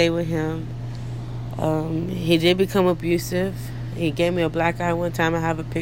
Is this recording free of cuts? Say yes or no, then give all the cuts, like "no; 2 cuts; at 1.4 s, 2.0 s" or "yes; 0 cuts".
yes; 0 cuts